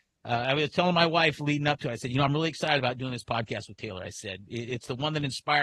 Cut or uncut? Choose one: uncut